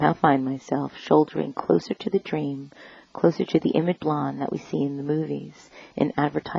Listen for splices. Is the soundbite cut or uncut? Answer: cut